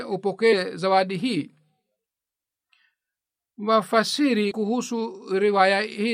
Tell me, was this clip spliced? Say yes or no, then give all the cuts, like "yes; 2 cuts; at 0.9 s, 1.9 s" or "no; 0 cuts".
no; 0 cuts